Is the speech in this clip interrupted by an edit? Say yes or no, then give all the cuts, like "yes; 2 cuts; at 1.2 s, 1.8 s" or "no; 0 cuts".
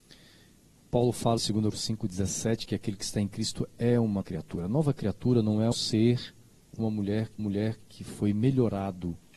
yes; 6 cuts; at 1.4 s, 1.7 s, 4.2 s, 5.7 s, 6.8 s, 7.4 s